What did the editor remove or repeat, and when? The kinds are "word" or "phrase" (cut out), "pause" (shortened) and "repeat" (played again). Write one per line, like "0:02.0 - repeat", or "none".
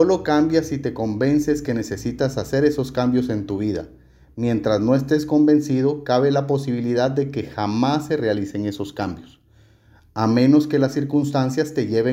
none